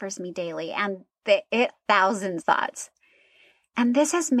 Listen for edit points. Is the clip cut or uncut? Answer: cut